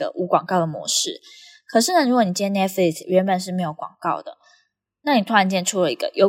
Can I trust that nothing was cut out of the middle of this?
yes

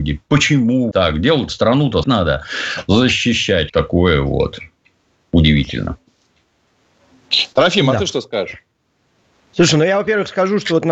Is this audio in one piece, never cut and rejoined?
no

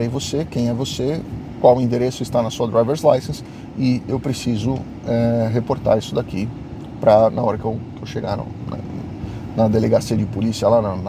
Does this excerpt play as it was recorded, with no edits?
yes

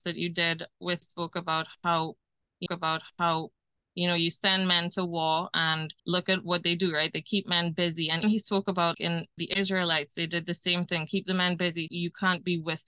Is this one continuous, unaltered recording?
no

